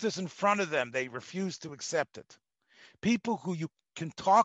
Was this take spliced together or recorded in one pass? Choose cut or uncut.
uncut